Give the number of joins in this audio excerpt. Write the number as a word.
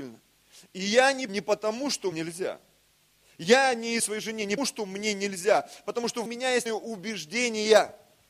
six